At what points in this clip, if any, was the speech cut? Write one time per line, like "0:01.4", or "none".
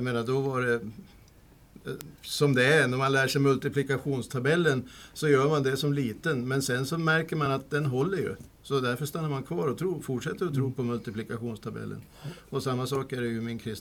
none